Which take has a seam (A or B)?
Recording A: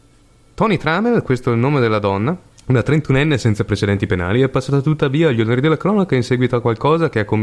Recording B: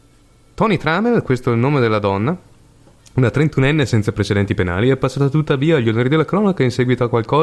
A